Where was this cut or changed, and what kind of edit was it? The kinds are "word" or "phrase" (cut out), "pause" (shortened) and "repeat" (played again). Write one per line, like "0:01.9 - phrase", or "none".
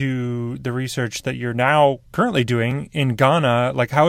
0:02.1 - pause